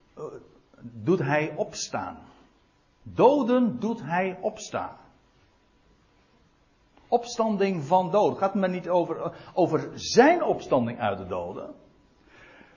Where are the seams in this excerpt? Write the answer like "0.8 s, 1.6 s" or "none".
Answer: none